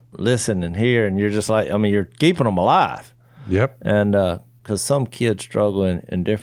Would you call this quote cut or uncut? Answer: uncut